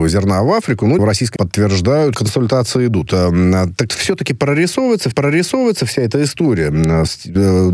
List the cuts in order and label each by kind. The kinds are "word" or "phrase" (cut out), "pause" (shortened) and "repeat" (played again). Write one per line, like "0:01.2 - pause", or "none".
0:01.0 - word
0:01.4 - word
0:02.1 - phrase
0:03.9 - word
0:05.1 - repeat